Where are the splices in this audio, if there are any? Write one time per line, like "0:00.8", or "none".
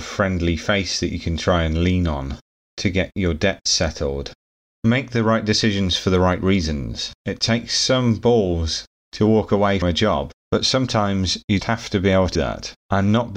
0:07.2
0:09.8
0:10.4
0:11.6
0:12.3

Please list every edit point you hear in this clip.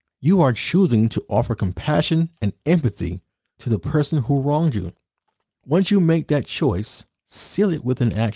none

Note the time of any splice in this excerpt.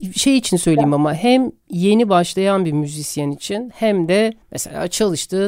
0:04.4

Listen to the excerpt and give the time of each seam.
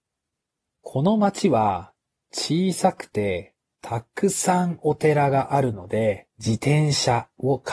0:06.3

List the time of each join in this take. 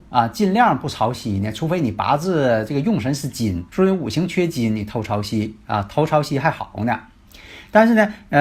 0:03.7

